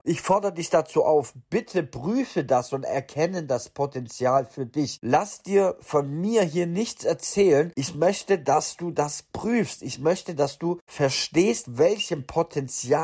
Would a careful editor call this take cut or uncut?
cut